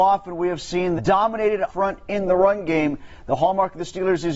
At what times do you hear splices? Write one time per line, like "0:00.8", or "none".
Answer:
0:01.0
0:01.7